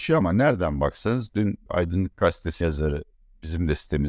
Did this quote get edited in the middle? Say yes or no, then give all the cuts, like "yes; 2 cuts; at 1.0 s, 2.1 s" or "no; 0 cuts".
yes; 2 cuts; at 1.7 s, 2.6 s